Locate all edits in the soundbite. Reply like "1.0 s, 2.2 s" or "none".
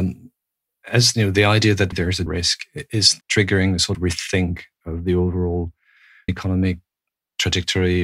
1.1 s, 1.9 s, 2.3 s, 3.2 s, 3.9 s, 6.3 s